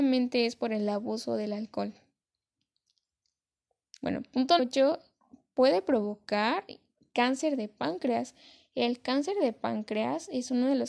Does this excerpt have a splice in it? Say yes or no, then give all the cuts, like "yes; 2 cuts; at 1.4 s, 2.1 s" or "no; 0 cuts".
yes; 1 cut; at 4.6 s